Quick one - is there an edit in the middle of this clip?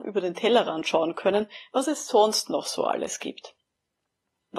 no; 0 cuts

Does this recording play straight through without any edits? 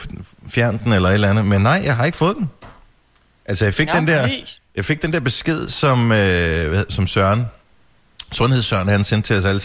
yes; 0 cuts

